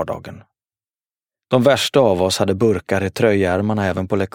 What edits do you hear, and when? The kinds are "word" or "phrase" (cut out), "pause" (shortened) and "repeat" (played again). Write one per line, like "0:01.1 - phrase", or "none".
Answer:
none